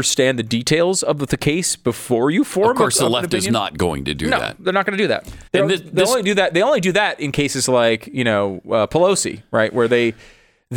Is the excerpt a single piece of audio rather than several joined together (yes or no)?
no